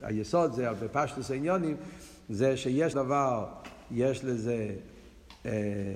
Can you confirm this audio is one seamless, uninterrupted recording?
no; 1 cut; at 2.9 s

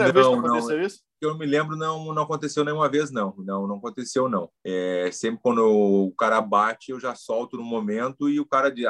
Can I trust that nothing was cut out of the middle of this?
no; 2 cuts; at 1.1 s, 4.6 s

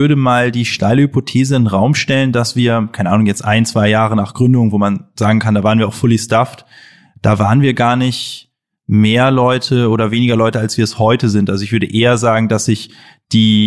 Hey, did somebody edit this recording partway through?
no; 0 cuts

